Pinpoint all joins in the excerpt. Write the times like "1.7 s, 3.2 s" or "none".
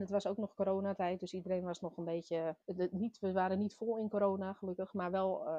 2.6 s